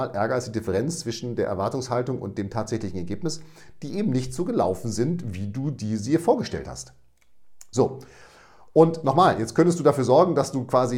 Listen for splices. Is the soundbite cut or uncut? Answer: uncut